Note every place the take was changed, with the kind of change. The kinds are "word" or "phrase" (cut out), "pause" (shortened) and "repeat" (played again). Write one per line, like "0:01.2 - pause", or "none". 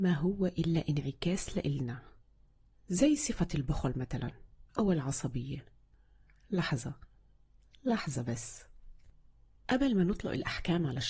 0:04.7 - pause